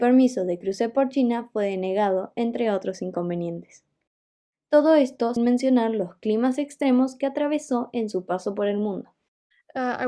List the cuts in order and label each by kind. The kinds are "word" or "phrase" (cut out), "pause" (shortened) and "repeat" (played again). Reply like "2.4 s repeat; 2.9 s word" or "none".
5.4 s word